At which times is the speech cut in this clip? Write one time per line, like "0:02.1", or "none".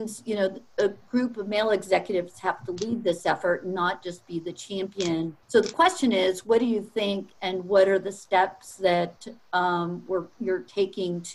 0:05.4